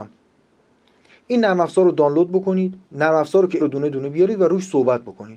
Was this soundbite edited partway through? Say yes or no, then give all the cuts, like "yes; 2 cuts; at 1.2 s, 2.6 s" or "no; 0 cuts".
yes; 2 cuts; at 2.8 s, 3.6 s